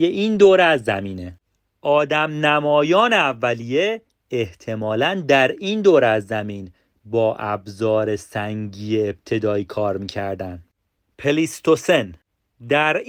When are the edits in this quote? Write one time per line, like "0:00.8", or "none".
none